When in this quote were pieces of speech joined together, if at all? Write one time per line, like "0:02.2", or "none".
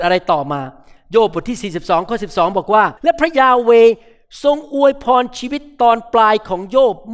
0:03.0